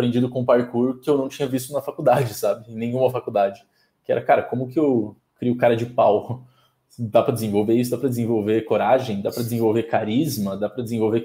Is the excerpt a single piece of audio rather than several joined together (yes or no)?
no